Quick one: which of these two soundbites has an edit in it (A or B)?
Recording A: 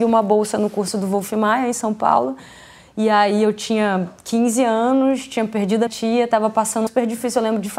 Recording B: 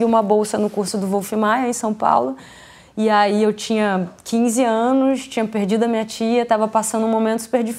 A